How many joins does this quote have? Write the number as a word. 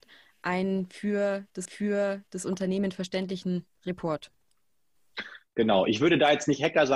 two